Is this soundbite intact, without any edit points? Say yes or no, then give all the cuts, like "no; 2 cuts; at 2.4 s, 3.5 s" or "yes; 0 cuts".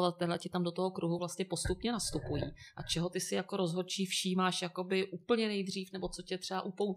yes; 0 cuts